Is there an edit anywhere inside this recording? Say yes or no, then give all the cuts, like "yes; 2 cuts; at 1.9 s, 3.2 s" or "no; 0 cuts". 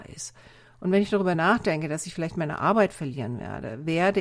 no; 0 cuts